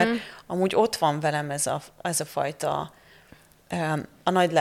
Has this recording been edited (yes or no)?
no